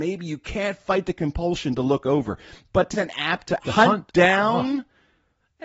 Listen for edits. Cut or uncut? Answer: cut